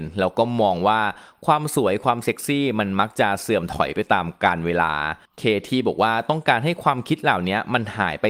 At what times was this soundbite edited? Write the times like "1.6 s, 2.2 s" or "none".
5.2 s